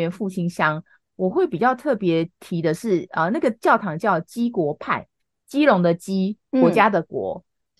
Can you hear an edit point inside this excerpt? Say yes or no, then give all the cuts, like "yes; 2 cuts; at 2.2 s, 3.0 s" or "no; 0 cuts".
no; 0 cuts